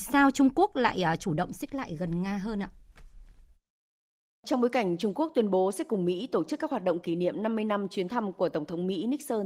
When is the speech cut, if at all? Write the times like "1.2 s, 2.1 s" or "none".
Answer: none